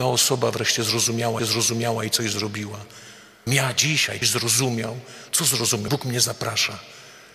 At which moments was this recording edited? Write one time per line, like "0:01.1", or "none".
0:01.4
0:03.5
0:04.2
0:05.9